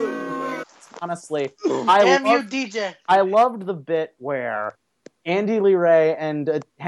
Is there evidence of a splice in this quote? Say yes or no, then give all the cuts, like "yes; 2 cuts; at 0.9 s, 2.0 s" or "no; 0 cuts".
no; 0 cuts